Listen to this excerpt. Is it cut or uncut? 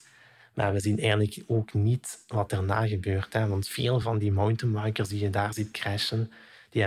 uncut